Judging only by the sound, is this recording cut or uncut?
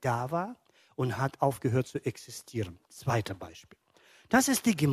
uncut